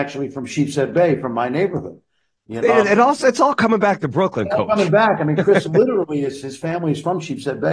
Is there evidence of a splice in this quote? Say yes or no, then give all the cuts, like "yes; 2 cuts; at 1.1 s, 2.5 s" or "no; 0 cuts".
yes; 1 cut; at 2.6 s